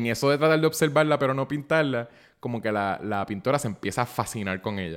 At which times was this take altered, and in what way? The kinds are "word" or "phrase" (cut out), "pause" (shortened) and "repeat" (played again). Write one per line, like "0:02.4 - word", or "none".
none